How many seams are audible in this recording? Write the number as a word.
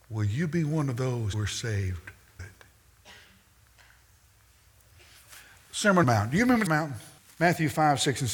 five